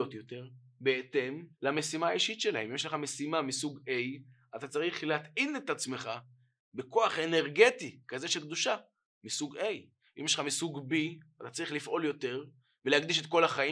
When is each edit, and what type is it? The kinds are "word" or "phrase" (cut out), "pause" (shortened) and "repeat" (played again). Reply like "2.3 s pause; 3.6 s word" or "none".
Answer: 1.5 s pause